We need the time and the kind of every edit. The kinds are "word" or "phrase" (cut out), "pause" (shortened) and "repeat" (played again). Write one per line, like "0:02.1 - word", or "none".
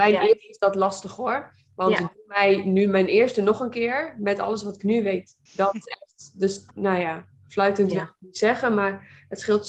0:05.5 - pause
0:06.7 - pause